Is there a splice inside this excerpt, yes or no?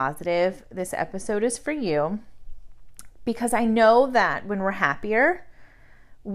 no